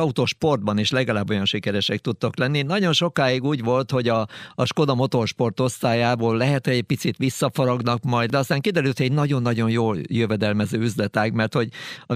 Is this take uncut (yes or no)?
yes